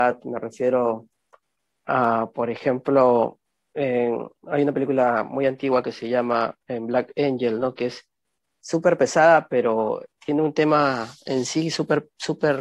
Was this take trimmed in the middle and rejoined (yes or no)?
no